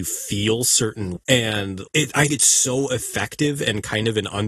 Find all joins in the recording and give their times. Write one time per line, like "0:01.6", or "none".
0:01.2
0:01.9
0:02.3